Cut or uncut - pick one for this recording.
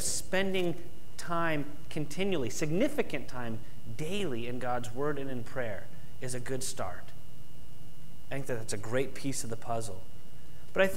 uncut